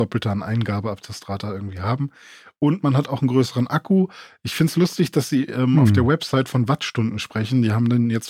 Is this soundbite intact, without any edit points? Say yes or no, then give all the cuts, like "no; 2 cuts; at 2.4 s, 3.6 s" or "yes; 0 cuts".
yes; 0 cuts